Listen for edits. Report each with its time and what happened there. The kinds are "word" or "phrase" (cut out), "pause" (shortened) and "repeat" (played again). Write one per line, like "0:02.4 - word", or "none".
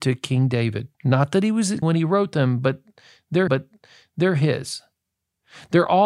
0:00.9 - pause
0:01.8 - word
0:03.5 - repeat